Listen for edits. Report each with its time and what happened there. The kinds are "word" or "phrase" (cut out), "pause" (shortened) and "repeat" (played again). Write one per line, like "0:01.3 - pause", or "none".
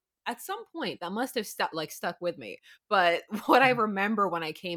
none